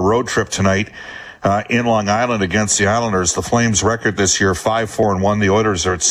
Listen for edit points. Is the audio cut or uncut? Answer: uncut